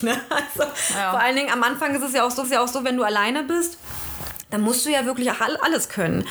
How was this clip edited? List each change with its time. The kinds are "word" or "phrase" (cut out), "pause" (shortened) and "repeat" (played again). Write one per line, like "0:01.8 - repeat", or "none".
0:02.4 - repeat